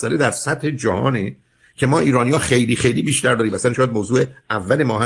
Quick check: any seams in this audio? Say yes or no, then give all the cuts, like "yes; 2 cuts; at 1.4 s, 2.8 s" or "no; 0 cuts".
no; 0 cuts